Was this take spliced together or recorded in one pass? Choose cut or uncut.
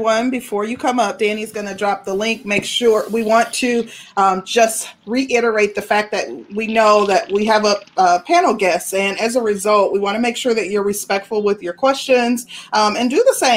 uncut